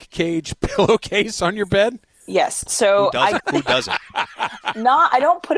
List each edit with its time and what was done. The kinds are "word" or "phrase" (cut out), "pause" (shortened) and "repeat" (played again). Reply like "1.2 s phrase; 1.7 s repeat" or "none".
3.4 s word